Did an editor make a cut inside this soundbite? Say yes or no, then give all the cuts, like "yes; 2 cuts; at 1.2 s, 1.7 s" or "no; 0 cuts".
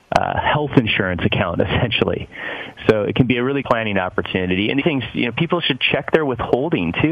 yes; 2 cuts; at 3.6 s, 4.8 s